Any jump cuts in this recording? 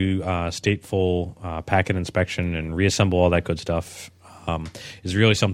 no; 0 cuts

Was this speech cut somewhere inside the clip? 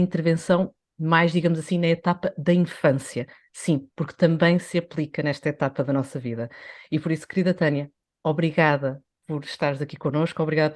no; 0 cuts

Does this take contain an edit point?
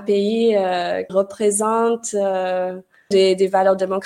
yes; 2 cuts; at 1.1 s, 3.1 s

